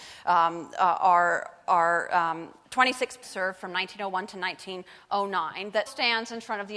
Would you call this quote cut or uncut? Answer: cut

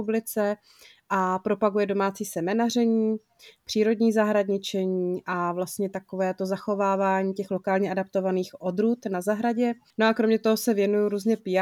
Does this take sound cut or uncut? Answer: uncut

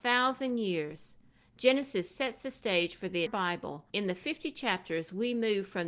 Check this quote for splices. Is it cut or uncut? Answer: cut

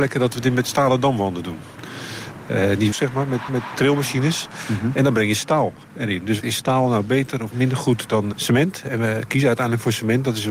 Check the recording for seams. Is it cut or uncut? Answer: cut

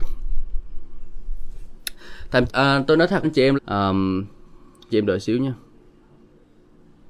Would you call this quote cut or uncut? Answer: cut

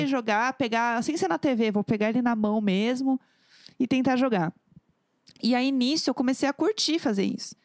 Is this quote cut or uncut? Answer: uncut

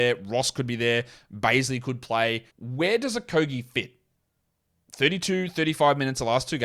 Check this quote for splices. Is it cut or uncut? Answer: cut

